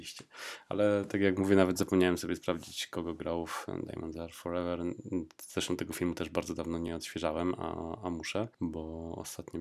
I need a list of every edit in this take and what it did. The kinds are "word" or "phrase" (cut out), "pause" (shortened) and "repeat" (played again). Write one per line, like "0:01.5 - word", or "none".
none